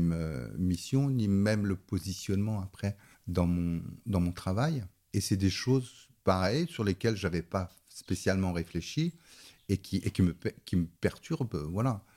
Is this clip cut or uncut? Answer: cut